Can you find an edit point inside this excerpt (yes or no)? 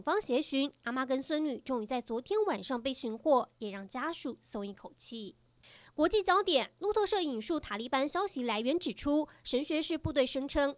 no